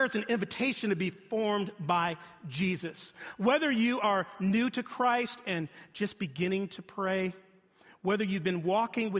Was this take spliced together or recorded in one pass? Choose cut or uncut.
uncut